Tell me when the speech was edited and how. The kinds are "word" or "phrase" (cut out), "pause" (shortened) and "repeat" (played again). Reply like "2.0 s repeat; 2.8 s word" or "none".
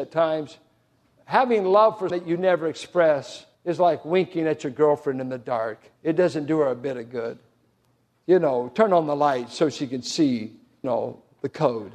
2.1 s word; 3.5 s pause; 6.0 s pause; 7.6 s pause; 10.8 s word